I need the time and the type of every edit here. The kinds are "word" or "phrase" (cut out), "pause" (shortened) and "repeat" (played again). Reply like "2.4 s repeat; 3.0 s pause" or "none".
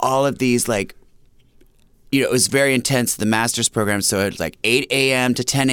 none